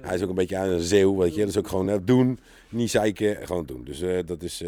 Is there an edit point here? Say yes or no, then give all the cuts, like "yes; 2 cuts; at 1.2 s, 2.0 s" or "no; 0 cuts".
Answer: no; 0 cuts